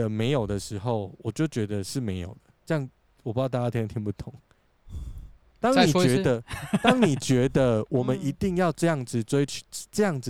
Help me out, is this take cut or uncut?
cut